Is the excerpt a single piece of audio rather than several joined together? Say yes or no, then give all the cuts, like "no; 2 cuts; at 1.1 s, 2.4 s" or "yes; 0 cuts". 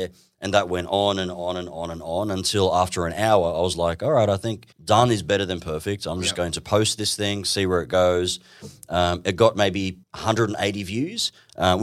no; 2 cuts; at 4.7 s, 10.0 s